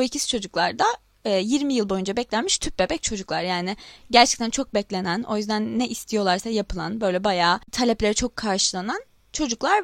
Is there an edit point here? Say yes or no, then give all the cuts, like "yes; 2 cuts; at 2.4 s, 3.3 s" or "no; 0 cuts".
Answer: no; 0 cuts